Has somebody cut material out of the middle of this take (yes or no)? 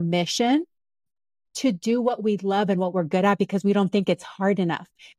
no